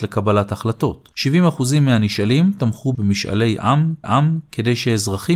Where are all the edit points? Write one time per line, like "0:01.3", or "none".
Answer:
0:01.1
0:02.9
0:04.0